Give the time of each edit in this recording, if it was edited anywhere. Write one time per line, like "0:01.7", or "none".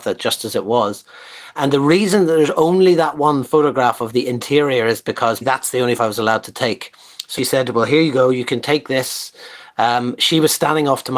0:01.6
0:05.4
0:06.0
0:07.4